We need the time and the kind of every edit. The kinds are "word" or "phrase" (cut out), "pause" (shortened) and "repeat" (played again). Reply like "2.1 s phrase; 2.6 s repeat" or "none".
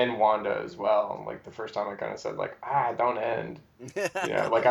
none